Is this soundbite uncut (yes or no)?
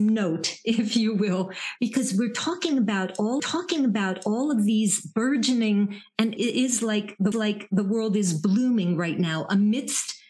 no